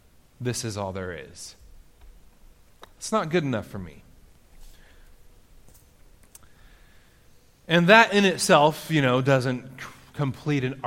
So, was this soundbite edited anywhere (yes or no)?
no